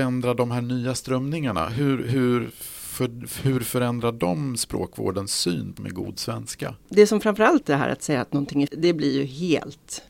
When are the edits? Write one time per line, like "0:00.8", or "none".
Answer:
0:05.8
0:07.6
0:08.7